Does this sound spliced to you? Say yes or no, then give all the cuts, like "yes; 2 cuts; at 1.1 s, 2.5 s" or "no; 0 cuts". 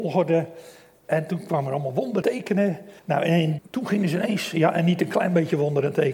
yes; 3 cuts; at 2.2 s, 3.0 s, 3.6 s